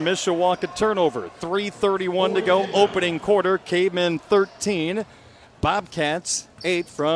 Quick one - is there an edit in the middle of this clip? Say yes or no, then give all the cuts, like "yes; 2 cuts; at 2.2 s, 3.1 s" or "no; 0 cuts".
no; 0 cuts